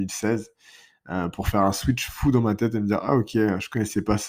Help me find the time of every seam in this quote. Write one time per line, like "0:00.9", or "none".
none